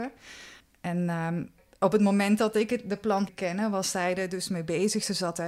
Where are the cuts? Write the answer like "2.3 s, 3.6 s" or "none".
3.3 s